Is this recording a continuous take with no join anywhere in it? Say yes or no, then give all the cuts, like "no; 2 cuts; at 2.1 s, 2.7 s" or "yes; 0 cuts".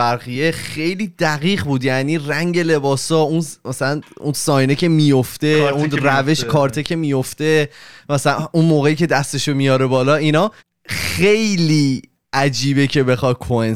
no; 1 cut; at 10.6 s